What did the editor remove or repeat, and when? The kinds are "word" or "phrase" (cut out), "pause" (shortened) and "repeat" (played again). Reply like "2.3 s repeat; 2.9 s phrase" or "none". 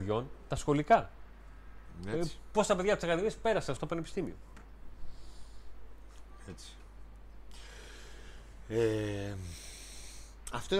3.8 s word